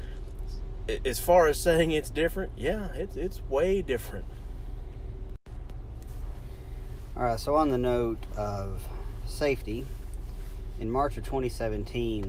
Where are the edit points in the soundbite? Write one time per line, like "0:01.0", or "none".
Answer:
none